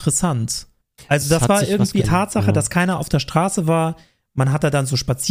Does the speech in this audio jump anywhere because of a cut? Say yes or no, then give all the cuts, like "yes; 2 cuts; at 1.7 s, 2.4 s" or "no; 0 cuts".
yes; 1 cut; at 2.0 s